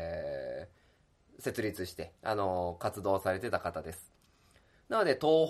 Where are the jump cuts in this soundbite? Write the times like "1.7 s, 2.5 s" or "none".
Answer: 2.2 s